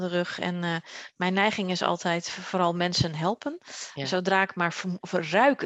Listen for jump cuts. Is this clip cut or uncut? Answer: uncut